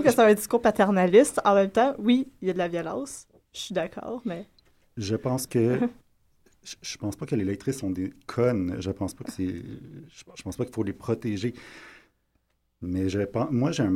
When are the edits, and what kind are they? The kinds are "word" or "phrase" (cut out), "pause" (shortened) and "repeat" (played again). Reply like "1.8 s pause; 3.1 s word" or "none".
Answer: 5.5 s word; 6.0 s pause

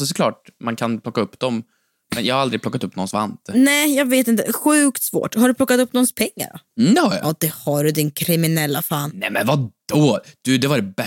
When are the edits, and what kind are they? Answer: none

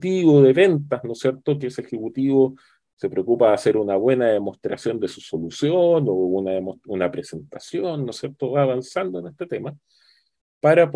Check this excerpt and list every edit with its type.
none

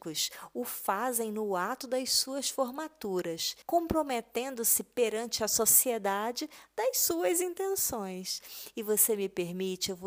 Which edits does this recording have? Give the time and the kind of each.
3.6 s pause

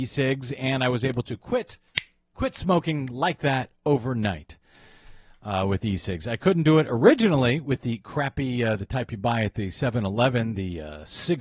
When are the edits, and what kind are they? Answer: none

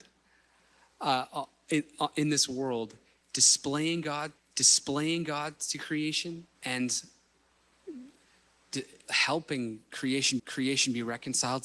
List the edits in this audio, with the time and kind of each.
4.4 s repeat; 6.5 s pause; 9.0 s word; 10.4 s repeat

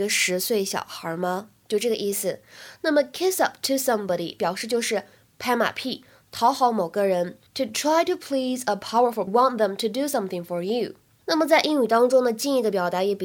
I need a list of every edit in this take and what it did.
9.3 s phrase

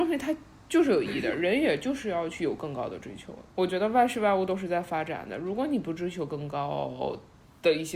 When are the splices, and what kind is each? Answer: 3.5 s pause

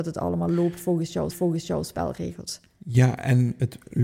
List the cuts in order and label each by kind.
1.3 s repeat

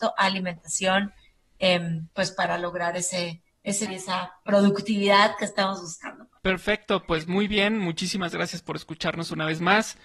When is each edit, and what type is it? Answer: 3.9 s word; 6.4 s pause

